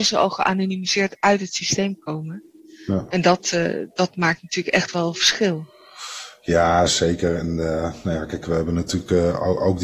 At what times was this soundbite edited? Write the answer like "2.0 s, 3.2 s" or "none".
none

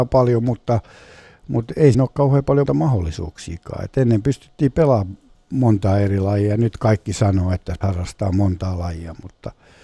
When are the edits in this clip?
1.9 s, 2.7 s, 7.8 s

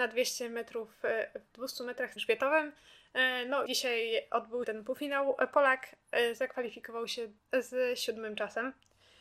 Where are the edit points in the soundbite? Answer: 2.2 s, 3.7 s, 4.6 s, 7.4 s

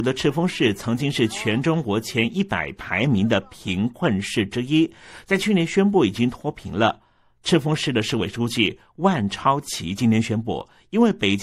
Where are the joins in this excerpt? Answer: none

